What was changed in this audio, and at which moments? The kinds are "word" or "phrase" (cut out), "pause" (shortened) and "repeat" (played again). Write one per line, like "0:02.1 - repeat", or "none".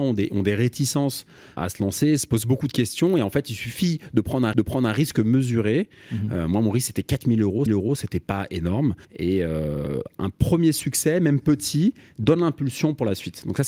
0:01.6 - word
0:04.5 - repeat
0:07.7 - repeat
0:09.0 - pause